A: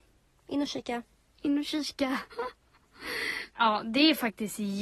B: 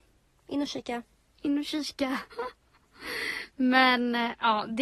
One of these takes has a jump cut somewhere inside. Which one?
A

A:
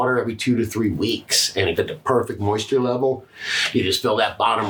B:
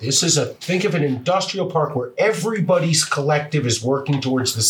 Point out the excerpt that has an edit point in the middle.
A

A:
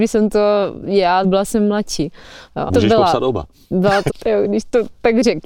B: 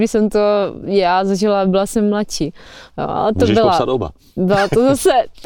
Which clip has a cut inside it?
A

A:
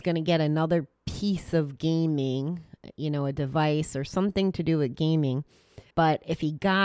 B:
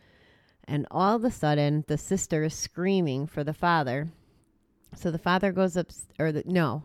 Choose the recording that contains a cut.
A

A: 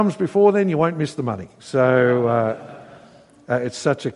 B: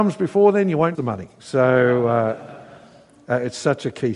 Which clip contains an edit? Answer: B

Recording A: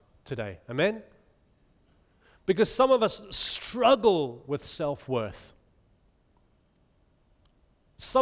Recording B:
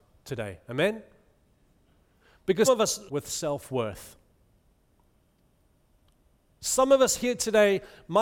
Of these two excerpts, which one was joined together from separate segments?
B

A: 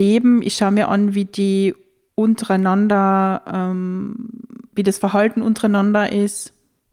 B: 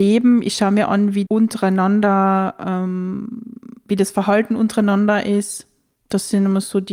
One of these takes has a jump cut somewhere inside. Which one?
B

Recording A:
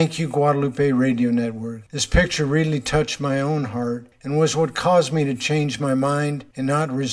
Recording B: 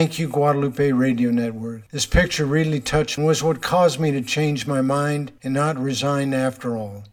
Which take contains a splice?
B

